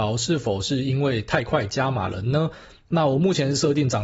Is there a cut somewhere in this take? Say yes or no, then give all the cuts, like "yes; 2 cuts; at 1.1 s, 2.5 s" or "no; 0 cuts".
no; 0 cuts